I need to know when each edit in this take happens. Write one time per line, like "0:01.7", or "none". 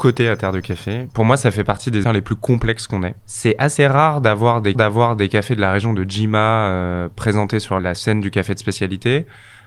0:02.0
0:03.2
0:04.7
0:07.8